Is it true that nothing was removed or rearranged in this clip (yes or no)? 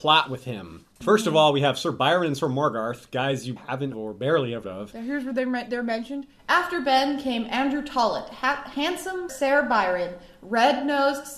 no